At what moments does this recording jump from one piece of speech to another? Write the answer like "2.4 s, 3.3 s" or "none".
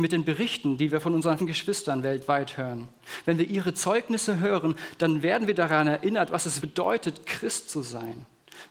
1.4 s, 6.6 s